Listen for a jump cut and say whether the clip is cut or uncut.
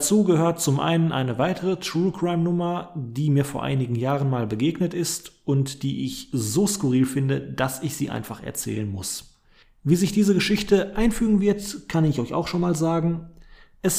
uncut